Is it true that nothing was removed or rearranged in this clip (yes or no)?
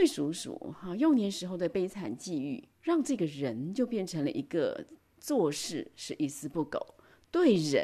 no